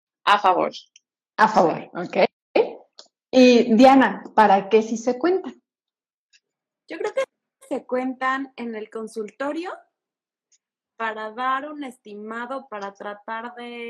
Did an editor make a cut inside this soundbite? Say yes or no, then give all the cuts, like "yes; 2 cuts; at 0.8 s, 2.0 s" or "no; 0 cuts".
yes; 1 cut; at 12.7 s